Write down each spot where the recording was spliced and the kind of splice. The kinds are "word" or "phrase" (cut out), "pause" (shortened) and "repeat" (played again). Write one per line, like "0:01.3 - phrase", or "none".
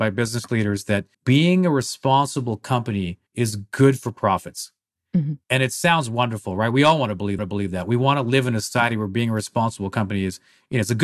0:01.1 - pause
0:03.3 - pause
0:05.4 - pause
0:07.4 - repeat